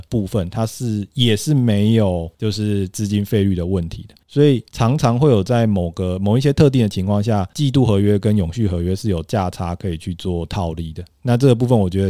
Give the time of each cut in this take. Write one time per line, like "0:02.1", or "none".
none